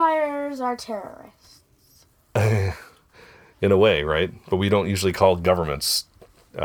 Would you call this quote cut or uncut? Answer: uncut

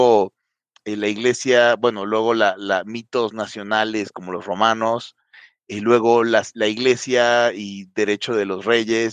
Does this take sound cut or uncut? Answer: uncut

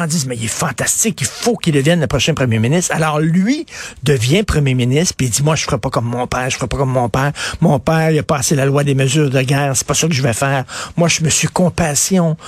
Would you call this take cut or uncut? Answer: uncut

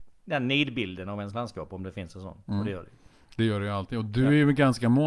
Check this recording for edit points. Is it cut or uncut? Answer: uncut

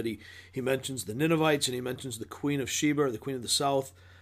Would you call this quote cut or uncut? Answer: uncut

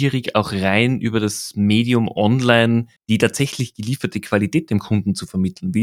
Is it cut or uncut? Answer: cut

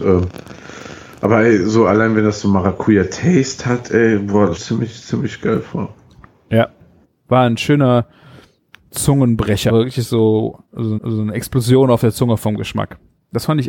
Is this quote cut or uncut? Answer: cut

